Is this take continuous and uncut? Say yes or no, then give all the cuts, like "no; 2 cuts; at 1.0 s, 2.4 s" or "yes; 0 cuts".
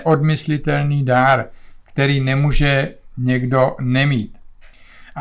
yes; 0 cuts